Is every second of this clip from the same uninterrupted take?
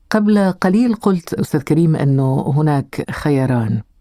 yes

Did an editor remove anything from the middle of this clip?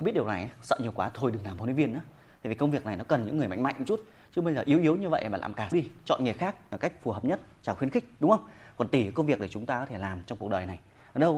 yes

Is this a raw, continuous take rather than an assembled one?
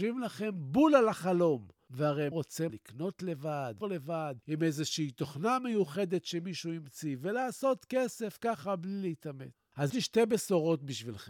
no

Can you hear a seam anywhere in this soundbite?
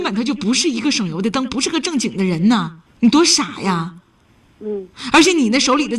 yes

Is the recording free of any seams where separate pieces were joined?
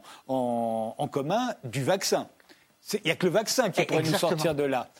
yes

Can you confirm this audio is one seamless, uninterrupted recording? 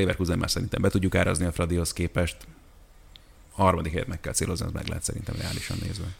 yes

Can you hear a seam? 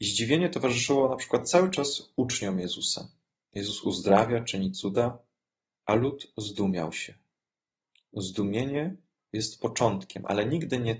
no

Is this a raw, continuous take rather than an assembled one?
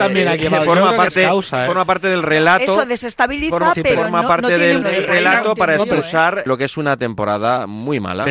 no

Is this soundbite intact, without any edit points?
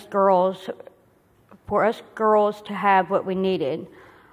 yes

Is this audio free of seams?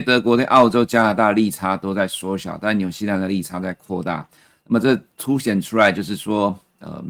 yes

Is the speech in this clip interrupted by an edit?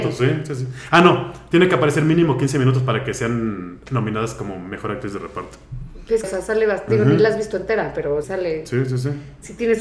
yes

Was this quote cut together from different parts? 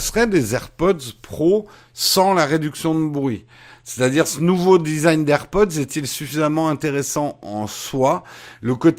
no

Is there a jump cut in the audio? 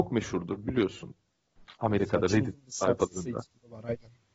no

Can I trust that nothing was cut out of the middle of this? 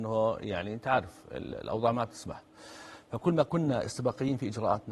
yes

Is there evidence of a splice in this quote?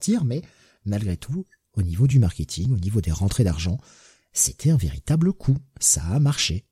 no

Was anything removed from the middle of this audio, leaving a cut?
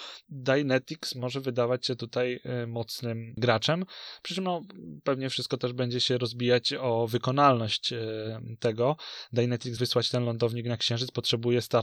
yes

